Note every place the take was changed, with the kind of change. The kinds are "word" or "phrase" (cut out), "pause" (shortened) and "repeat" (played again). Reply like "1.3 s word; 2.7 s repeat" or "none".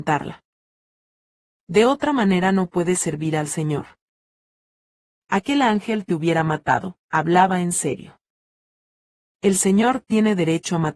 7.0 s pause